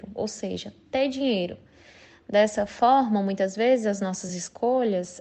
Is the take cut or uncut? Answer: uncut